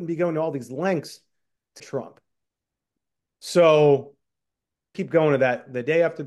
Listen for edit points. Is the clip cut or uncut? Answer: cut